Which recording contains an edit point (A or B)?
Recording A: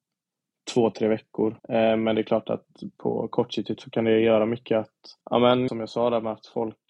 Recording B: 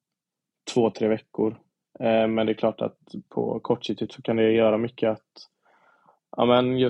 A